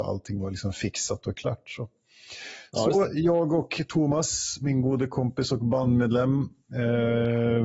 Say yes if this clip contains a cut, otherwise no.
no